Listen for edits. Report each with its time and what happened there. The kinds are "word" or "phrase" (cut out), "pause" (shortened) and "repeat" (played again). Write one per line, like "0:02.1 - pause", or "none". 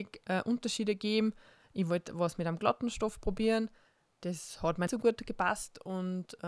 0:04.9 - word